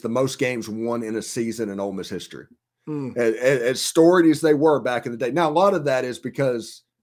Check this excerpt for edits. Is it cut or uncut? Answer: uncut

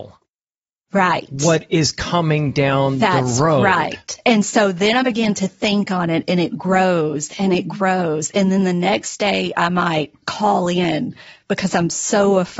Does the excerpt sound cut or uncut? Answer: uncut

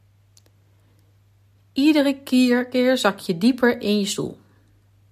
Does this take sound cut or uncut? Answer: uncut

